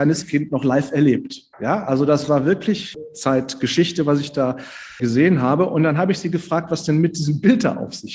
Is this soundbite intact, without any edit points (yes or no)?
no